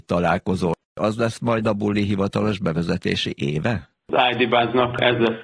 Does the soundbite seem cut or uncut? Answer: cut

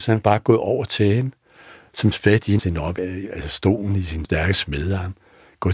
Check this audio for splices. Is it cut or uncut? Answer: cut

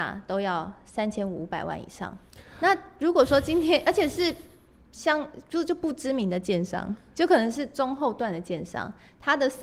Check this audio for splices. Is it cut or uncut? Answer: uncut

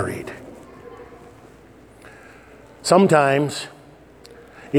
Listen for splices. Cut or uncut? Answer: uncut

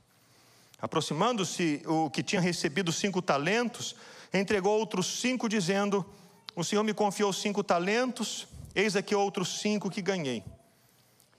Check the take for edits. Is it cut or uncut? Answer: uncut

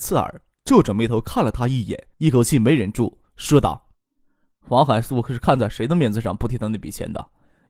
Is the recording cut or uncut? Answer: cut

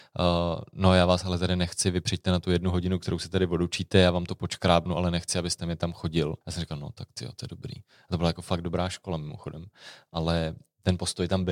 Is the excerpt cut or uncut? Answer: cut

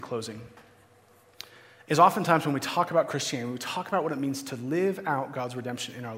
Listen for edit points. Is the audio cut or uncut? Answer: uncut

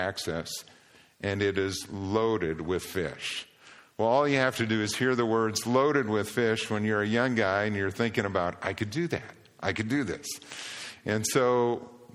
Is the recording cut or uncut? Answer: uncut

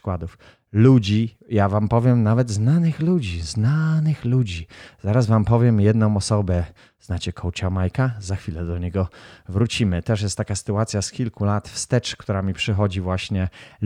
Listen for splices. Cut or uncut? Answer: uncut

